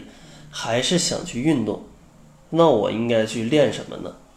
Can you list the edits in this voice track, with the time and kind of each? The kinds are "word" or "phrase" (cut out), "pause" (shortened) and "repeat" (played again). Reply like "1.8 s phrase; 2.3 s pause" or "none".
none